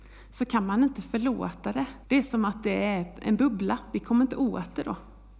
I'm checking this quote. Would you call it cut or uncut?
cut